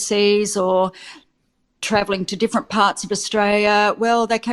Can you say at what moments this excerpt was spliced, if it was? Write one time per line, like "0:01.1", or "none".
none